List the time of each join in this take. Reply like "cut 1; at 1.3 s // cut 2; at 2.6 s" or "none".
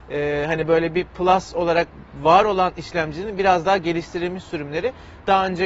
none